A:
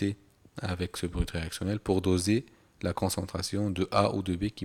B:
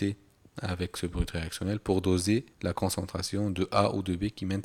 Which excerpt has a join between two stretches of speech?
B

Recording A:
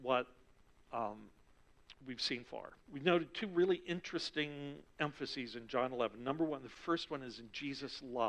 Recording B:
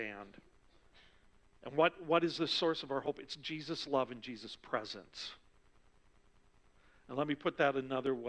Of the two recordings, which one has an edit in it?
A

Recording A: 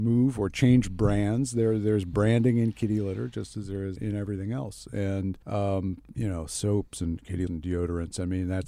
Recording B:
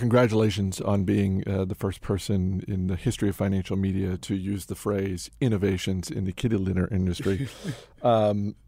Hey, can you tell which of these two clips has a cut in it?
A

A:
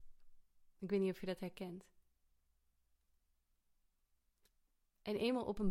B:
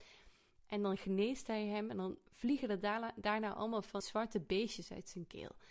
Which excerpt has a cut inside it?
B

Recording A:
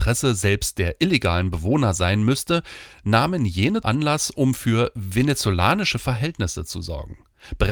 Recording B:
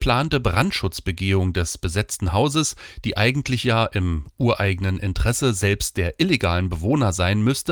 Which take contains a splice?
A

